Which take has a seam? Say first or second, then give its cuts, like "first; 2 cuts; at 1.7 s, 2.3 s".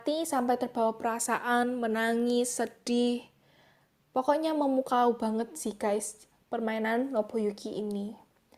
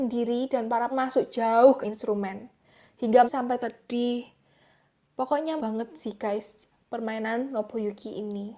second; 5 cuts; at 0.9 s, 1.8 s, 3.3 s, 3.6 s, 5.6 s